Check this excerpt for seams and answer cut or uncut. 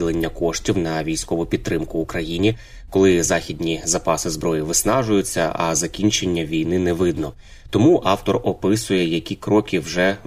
uncut